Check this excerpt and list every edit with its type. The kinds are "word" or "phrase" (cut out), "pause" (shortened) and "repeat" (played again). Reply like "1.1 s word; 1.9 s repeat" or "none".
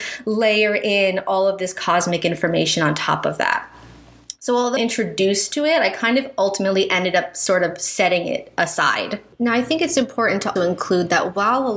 4.8 s phrase; 10.6 s word